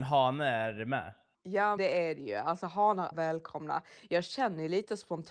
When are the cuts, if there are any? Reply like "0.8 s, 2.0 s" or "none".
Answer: 1.8 s, 3.1 s

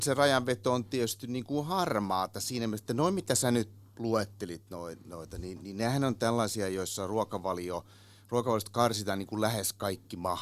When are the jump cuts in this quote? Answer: none

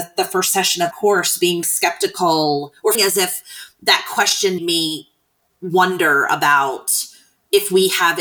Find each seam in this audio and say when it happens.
0.9 s, 1.6 s, 2.9 s, 4.6 s

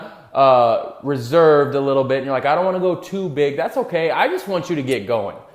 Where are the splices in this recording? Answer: none

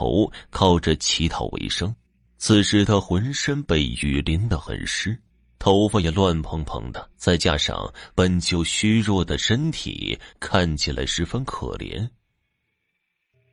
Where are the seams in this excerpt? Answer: 2.1 s, 5.3 s, 7.1 s

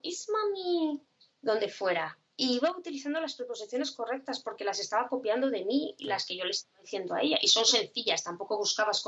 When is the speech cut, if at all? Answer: none

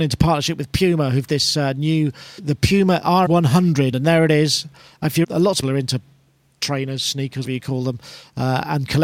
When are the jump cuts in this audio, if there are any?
1.3 s, 2.4 s, 3.2 s, 3.9 s, 5.2 s, 5.6 s, 7.4 s

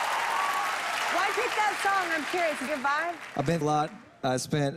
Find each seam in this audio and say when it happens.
1.3 s, 2.7 s, 3.6 s

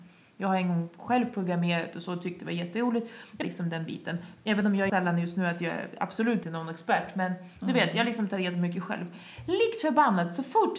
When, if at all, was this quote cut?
3.4 s, 4.9 s, 6.4 s

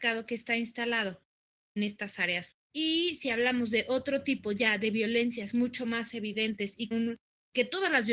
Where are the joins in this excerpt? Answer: 1.8 s, 2.6 s, 6.9 s

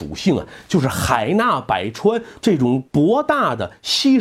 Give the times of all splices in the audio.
2.4 s, 2.9 s

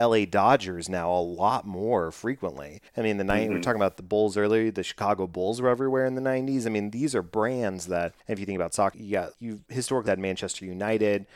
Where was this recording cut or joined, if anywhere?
2.9 s, 8.2 s, 8.9 s, 9.3 s, 10.1 s

